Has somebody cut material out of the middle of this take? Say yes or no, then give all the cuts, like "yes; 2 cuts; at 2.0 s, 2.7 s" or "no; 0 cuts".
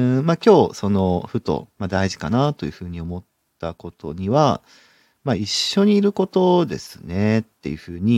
no; 0 cuts